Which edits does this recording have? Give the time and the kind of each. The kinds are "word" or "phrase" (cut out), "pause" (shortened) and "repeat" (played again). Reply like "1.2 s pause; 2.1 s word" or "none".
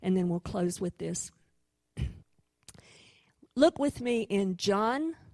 2.2 s pause

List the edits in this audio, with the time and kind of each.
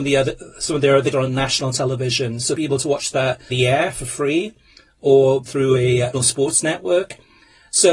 1.1 s word; 2.5 s word; 3.5 s word; 5.5 s word; 6.1 s word

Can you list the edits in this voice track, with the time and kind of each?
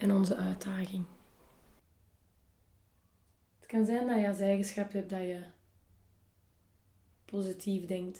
none

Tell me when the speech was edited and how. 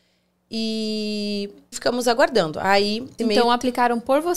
1.7 s word; 3.2 s word

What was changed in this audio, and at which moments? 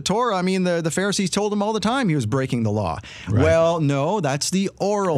none

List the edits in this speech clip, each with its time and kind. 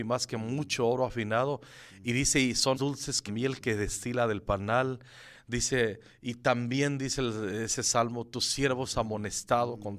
2.7 s word; 3.3 s word

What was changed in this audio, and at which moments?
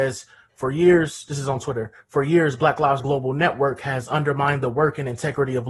3.0 s word

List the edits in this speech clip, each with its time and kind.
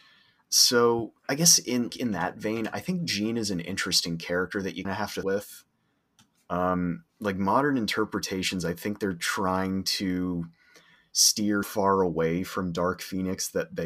1.2 s pause; 1.9 s word; 4.8 s word; 5.2 s phrase; 7.1 s pause; 11.6 s word

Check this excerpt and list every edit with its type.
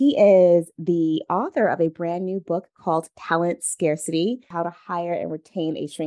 none

